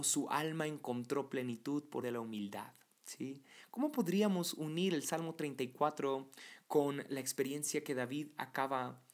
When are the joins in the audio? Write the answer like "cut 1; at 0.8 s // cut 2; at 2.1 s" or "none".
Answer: cut 1; at 2.0 s